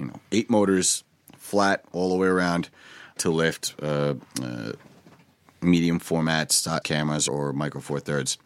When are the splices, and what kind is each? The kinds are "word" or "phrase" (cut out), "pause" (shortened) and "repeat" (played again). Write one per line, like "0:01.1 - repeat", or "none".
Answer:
0:03.2 - word
0:06.8 - word
0:07.3 - word